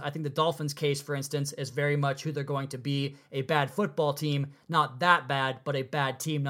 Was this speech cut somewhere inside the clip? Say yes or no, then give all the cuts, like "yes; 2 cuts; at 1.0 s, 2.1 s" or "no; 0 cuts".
no; 0 cuts